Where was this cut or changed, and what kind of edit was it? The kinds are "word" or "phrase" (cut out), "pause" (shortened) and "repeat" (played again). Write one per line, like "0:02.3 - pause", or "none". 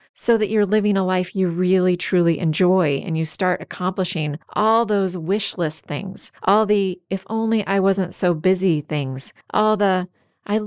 0:04.4 - pause
0:06.4 - pause
0:09.4 - pause